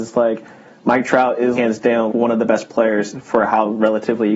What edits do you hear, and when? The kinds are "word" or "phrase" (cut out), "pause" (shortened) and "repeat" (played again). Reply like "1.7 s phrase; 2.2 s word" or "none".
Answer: 1.5 s word; 2.1 s word